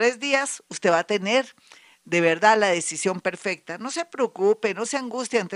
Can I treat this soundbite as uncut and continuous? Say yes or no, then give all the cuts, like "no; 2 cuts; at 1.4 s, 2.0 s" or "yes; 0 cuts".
yes; 0 cuts